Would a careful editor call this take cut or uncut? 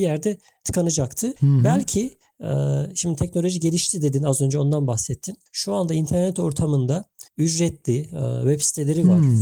cut